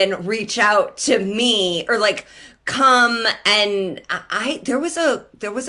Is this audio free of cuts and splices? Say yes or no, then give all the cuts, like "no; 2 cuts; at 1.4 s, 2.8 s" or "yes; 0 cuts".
yes; 0 cuts